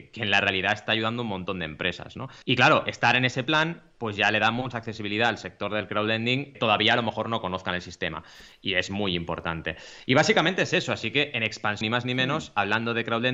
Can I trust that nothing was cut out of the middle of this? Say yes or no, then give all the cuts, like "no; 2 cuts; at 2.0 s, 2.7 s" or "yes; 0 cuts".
no; 4 cuts; at 2.4 s, 4.7 s, 6.5 s, 11.8 s